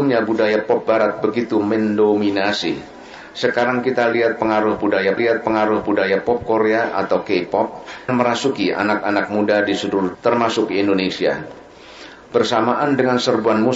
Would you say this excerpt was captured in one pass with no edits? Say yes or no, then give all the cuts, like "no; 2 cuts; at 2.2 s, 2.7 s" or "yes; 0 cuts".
no; 3 cuts; at 5.2 s, 8.1 s, 10.1 s